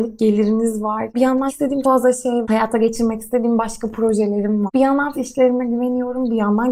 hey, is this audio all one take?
no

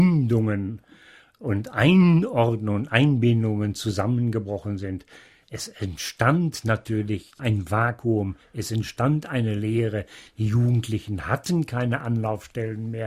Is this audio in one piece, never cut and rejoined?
yes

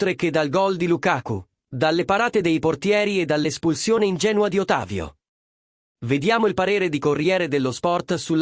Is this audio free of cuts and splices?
yes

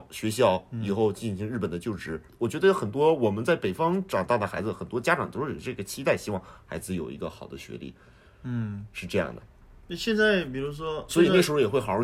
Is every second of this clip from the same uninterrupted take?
no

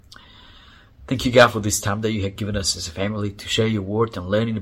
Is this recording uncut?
yes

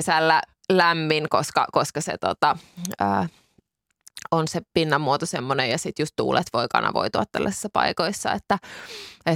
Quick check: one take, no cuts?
yes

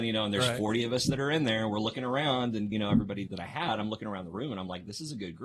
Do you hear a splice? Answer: yes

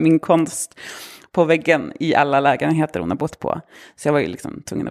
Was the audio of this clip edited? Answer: no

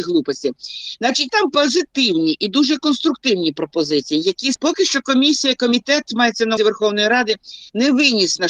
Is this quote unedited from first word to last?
no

